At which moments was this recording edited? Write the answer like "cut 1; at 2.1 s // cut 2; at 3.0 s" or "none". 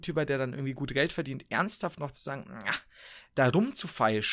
none